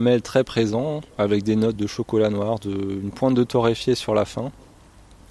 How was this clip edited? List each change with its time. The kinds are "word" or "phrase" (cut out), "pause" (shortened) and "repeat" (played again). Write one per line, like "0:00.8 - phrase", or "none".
0:01.1 - pause
0:01.8 - word